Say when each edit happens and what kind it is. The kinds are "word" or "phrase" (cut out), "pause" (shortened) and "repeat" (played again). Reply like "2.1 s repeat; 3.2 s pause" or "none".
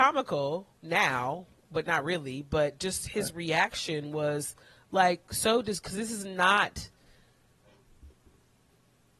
none